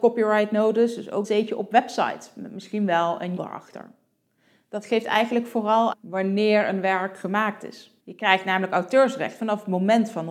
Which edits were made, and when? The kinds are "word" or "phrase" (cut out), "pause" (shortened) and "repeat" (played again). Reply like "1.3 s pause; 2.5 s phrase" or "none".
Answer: 1.2 s word; 3.4 s word; 5.9 s word; 8.0 s pause

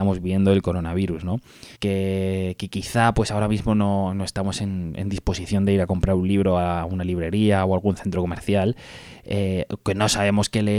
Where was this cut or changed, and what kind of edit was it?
1.7 s pause

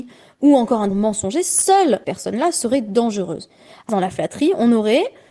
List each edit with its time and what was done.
0.9 s word; 2.0 s word; 3.9 s word

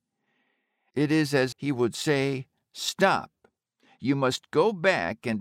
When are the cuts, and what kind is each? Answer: 1.5 s word

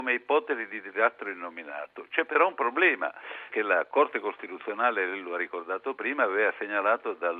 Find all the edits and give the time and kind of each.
3.5 s word

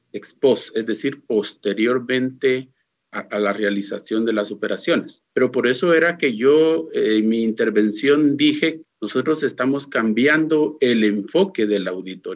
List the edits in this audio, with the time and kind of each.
3.2 s word; 5.3 s pause; 8.8 s word

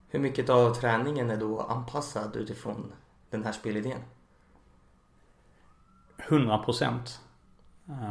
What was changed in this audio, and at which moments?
none

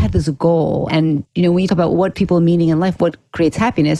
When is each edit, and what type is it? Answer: 1.7 s word; 2.1 s word

